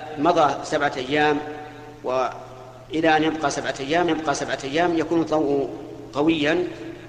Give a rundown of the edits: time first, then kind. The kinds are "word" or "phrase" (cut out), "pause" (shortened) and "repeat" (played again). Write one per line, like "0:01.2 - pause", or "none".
0:04.1 - repeat